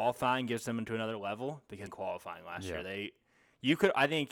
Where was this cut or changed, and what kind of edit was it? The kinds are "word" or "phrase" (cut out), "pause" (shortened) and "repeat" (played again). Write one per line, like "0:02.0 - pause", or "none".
0:01.9 - phrase